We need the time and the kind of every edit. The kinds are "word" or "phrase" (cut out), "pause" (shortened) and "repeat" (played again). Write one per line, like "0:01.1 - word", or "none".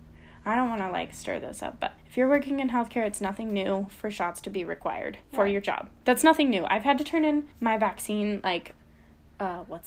0:02.0 - pause
0:05.2 - pause
0:07.5 - pause

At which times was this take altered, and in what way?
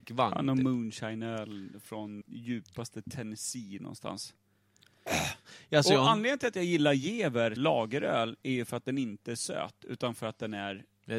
0:02.2 - word
0:07.6 - word

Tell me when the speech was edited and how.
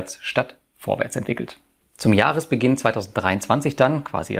none

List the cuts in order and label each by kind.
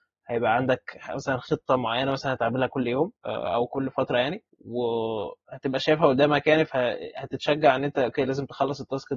0:03.2 - pause
0:04.5 - pause

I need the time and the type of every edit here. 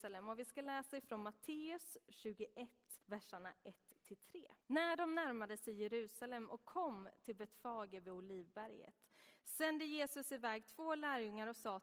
0:03.0 - pause
0:04.6 - pause

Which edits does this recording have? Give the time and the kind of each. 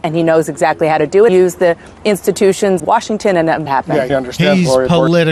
0:01.3 - word
0:02.8 - word
0:03.7 - phrase
0:04.1 - word

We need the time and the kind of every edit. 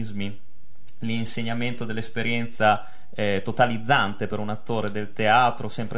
none

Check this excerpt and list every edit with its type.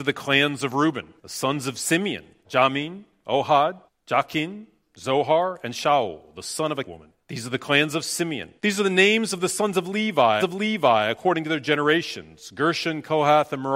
0:01.2 - pause
0:02.4 - word
0:03.9 - pause
0:06.8 - word
0:07.2 - pause
0:08.6 - pause
0:10.4 - repeat

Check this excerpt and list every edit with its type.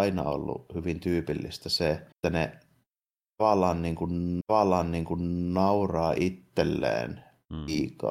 0:02.1 - pause
0:04.4 - repeat

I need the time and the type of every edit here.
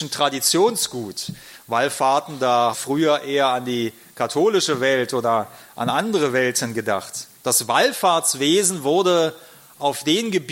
0:02.7 - phrase
0:07.4 - pause

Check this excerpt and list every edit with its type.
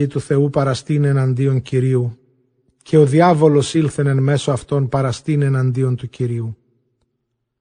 none

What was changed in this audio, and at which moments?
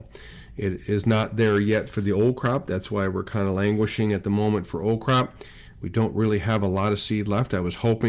none

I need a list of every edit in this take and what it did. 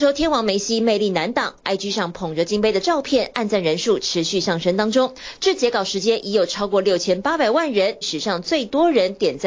0:08.0 - phrase

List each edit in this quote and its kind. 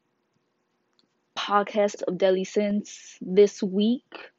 0:02.0 - word

